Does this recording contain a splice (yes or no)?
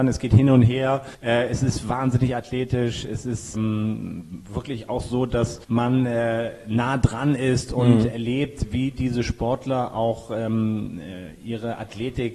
yes